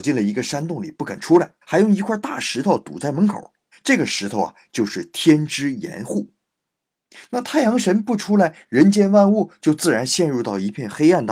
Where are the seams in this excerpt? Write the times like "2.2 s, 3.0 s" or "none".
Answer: 1.6 s, 3.7 s